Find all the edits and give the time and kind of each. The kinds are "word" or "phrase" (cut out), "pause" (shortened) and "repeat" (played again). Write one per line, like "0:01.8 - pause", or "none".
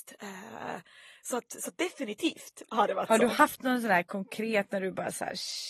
none